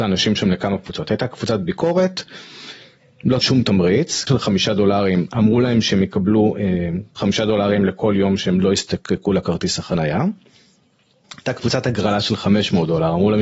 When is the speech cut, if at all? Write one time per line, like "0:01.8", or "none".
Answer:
0:03.4
0:04.3